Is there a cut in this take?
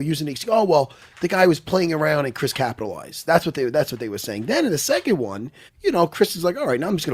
yes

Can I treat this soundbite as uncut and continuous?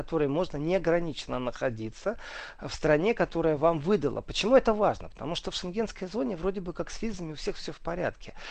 yes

